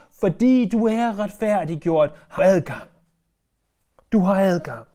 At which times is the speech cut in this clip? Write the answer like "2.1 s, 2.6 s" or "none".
2.4 s